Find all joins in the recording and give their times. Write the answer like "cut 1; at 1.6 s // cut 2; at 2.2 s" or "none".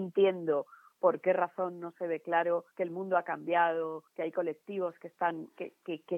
cut 1; at 2.7 s // cut 2; at 4.1 s